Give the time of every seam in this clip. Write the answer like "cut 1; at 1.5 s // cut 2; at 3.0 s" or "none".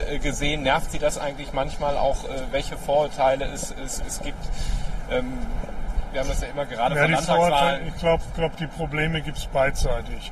none